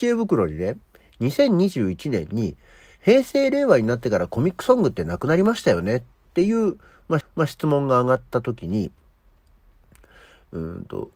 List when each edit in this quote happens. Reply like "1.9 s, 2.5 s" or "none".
7.2 s